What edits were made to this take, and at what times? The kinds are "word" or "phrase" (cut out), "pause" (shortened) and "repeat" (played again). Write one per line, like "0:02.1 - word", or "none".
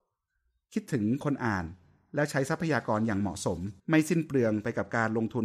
0:03.8 - pause